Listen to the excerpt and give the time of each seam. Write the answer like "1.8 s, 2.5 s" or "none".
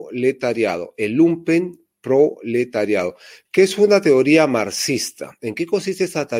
none